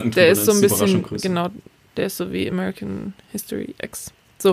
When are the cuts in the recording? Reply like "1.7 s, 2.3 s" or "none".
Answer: none